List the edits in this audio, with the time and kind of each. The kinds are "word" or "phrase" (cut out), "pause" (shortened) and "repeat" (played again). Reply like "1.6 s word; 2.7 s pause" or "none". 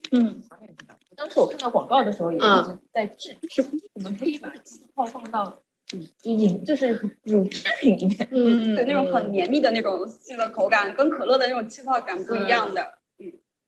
3.9 s pause; 8.8 s word